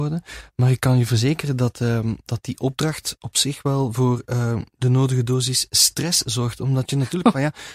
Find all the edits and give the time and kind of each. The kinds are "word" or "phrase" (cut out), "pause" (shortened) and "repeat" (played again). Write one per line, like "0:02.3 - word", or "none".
none